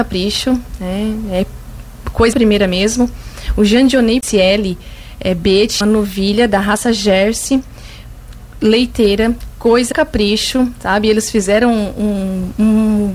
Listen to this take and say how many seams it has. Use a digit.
4